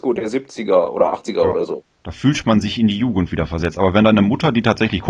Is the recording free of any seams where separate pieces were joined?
no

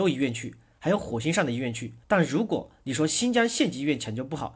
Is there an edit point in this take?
yes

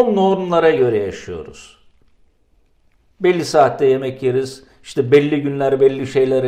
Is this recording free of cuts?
yes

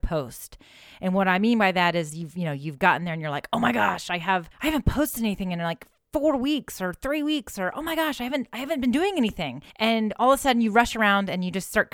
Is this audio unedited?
no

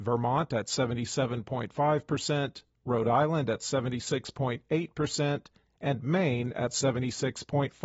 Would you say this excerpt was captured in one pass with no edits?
yes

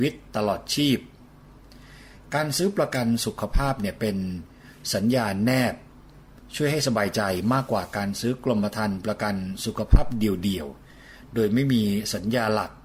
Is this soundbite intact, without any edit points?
yes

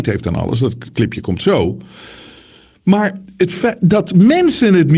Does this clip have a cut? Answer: no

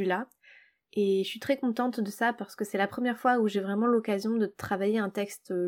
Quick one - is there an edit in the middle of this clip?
no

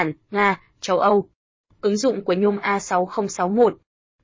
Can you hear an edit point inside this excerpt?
no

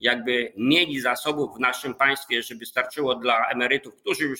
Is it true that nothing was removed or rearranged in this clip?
yes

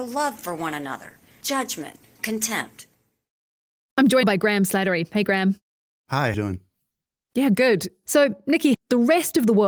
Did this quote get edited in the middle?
yes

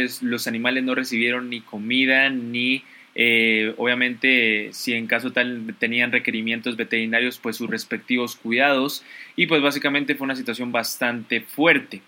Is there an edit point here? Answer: no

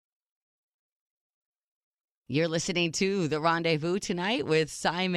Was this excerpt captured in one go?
yes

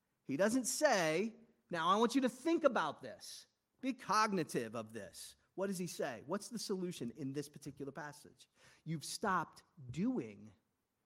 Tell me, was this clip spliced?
no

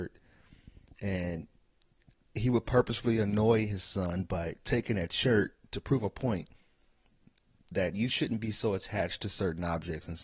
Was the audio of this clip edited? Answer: no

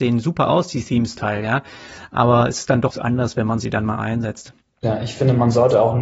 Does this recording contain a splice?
yes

